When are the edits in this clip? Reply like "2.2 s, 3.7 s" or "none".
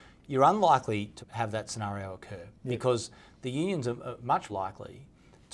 1.2 s, 4.5 s